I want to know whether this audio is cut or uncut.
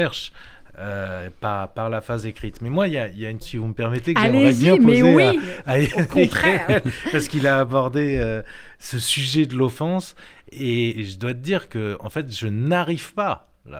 cut